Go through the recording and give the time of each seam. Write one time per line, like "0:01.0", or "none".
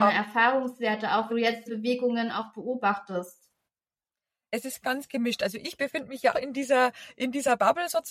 0:01.3
0:01.7
0:04.8
0:05.8
0:06.3